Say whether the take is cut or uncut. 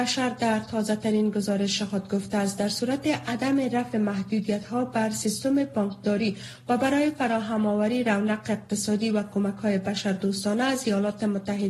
uncut